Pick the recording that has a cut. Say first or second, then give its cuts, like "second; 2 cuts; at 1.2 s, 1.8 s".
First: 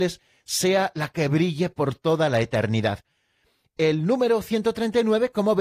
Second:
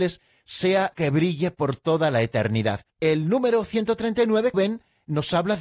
second; 3 cuts; at 0.9 s, 2.9 s, 4.5 s